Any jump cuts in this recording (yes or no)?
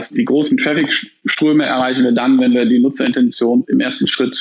no